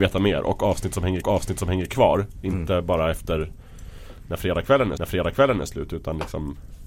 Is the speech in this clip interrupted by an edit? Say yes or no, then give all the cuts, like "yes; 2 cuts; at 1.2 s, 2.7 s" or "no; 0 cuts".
yes; 2 cuts; at 1.2 s, 5.0 s